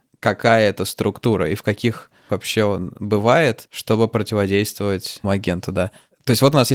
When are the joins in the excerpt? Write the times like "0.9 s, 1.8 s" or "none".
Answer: 2.3 s, 5.2 s